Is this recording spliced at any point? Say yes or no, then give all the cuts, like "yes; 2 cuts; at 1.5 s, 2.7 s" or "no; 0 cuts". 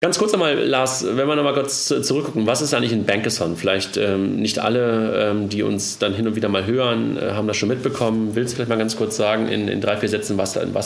no; 0 cuts